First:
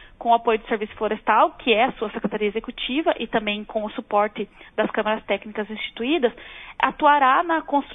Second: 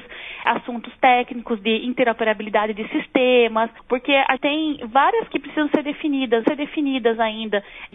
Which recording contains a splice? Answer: second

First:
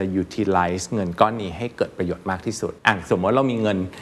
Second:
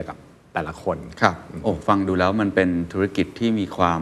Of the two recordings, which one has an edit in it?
first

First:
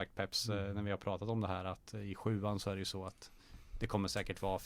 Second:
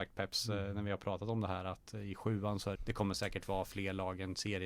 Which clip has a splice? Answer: second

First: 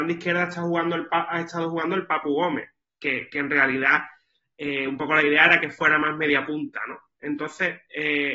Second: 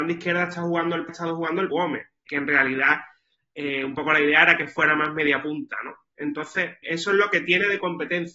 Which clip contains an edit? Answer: second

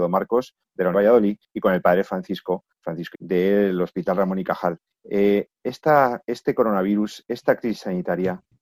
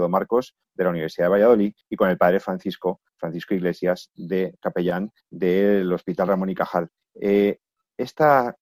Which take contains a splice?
first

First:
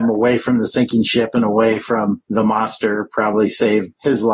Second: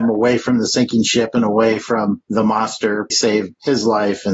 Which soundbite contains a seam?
second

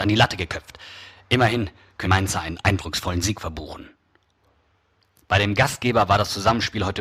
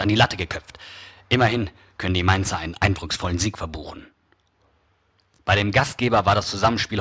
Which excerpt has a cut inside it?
first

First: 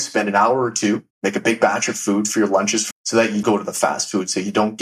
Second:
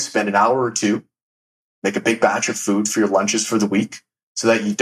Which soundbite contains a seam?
first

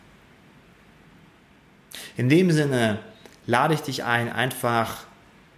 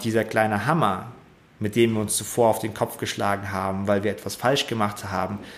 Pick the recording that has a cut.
second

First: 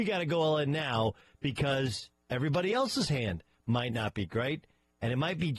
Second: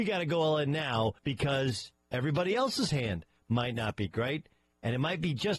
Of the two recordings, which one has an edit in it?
second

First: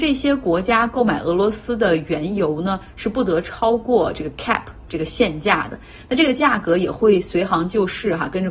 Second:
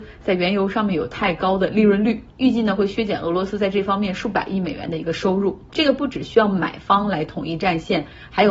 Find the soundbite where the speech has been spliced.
second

